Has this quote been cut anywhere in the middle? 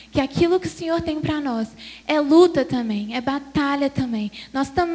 no; 0 cuts

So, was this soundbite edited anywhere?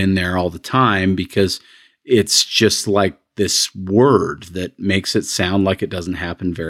no; 0 cuts

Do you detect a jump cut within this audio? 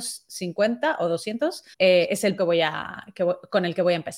yes; 2 cuts; at 1.7 s, 2.4 s

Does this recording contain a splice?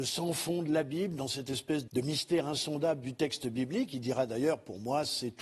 yes; 1 cut; at 1.9 s

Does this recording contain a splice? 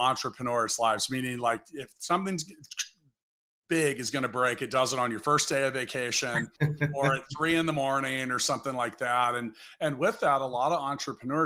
no; 0 cuts

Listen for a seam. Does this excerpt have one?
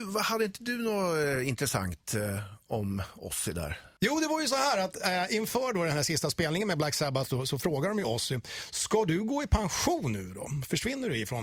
no; 0 cuts

